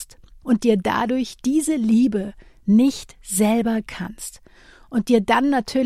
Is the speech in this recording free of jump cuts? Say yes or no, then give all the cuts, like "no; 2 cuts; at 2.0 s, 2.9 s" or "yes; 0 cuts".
no; 1 cut; at 3.9 s